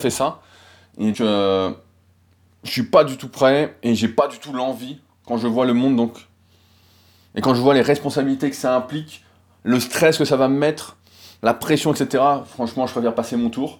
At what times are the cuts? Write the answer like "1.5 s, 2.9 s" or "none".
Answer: 1.1 s